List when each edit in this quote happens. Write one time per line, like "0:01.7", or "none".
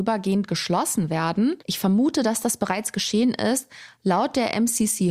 0:01.6